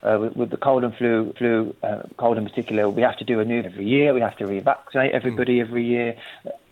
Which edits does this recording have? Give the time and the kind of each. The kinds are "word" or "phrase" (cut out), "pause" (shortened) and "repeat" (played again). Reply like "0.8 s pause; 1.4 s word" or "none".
1.4 s repeat; 3.6 s word

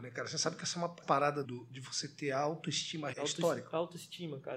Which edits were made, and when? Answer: 1.0 s word; 1.4 s word; 3.1 s word

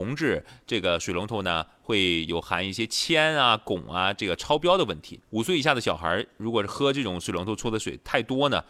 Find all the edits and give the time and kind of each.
5.3 s pause

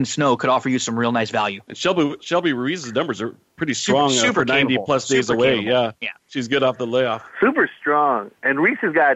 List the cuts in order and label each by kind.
1.6 s pause; 7.3 s pause

